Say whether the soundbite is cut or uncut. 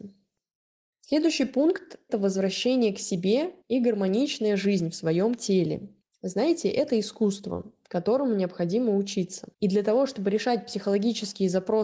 cut